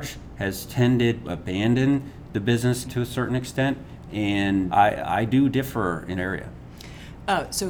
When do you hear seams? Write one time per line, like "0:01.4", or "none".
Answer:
0:01.2
0:02.8
0:04.7
0:06.2

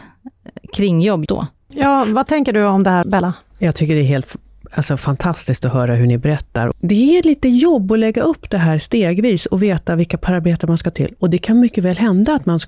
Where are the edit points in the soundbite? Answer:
0:01.3
0:03.0
0:10.9

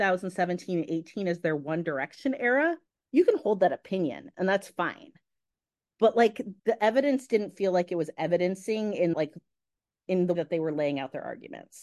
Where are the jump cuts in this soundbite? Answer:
0:02.9
0:06.6
0:09.1
0:10.3

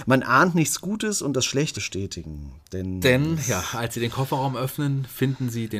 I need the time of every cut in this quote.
0:01.7

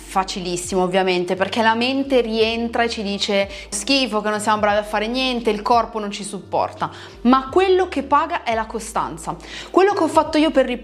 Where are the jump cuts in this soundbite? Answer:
0:03.7

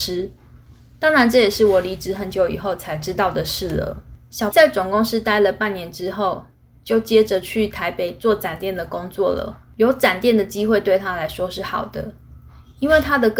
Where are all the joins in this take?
0:04.5

